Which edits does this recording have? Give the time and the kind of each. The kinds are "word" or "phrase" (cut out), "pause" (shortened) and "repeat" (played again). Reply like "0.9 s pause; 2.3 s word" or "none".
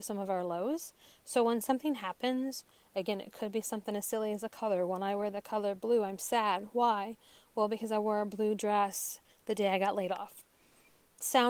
none

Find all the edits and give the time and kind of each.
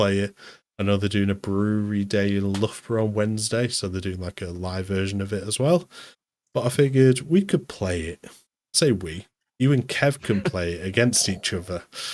none

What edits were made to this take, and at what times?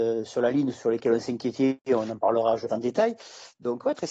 2.7 s word

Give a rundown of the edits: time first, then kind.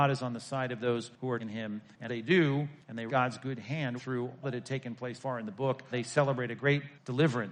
1.4 s word; 2.1 s word; 3.1 s word; 4.0 s word; 4.4 s word; 5.1 s word; 5.9 s word

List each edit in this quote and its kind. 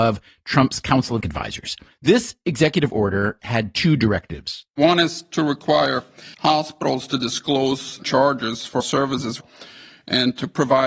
1.2 s word; 1.9 s pause; 4.7 s pause; 6.3 s pause; 8.0 s word; 8.8 s word

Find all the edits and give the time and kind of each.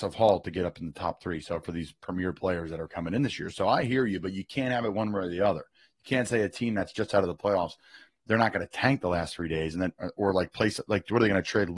none

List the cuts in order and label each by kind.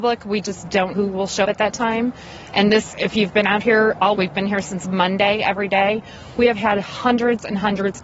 0.9 s word; 1.4 s word; 2.9 s word; 4.2 s word

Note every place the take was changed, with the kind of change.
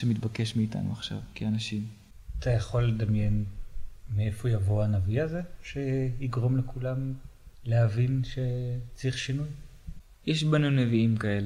1.3 s pause; 7.5 s pause

